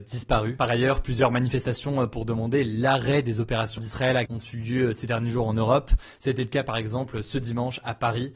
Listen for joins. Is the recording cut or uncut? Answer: cut